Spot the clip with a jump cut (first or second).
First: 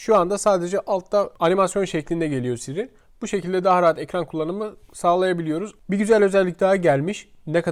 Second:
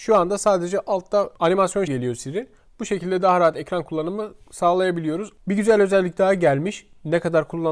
second